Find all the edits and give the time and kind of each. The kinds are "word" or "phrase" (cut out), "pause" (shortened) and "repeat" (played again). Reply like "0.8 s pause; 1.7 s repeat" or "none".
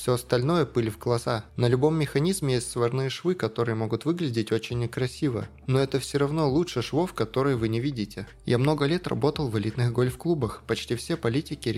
1.5 s pause